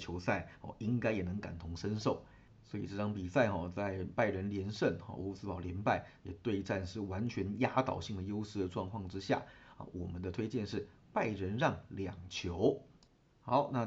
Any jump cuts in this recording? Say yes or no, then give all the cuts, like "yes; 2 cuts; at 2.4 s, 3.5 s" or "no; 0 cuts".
yes; 1 cut; at 13.0 s